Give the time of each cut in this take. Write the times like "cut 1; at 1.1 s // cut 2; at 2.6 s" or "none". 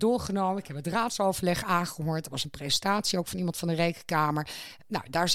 none

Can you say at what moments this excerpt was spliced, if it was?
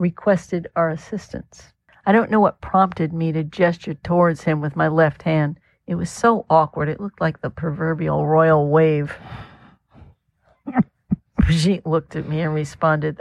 cut 1; at 1.9 s

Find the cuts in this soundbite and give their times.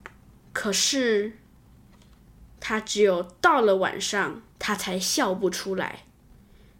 cut 1; at 4.5 s

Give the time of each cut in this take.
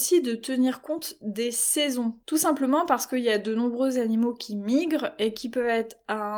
none

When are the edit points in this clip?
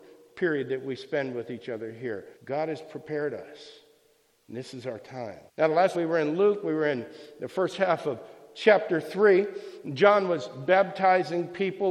cut 1; at 2.4 s // cut 2; at 5.5 s // cut 3; at 5.9 s

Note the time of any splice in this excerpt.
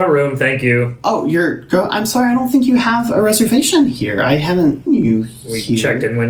cut 1; at 4.9 s

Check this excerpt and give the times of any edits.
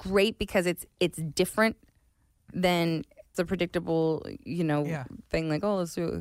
cut 1; at 3.3 s

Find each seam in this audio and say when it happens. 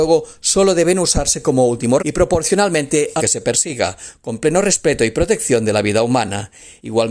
cut 1; at 2.0 s // cut 2; at 3.2 s

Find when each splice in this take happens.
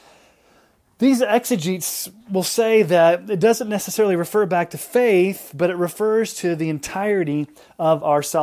cut 1; at 2.2 s

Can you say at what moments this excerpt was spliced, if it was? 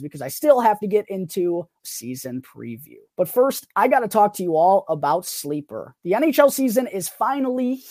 cut 1; at 1.8 s // cut 2; at 3.0 s

